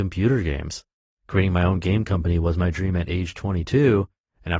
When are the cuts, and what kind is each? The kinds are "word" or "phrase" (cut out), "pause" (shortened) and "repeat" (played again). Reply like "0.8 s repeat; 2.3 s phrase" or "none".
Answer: none